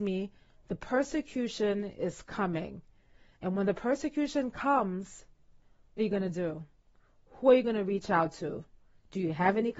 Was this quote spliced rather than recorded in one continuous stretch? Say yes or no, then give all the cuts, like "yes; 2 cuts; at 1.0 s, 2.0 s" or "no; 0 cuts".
yes; 1 cut; at 6.0 s